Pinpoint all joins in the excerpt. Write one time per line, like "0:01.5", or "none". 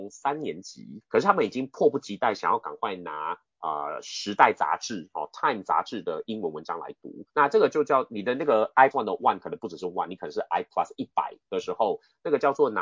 0:07.3
0:08.9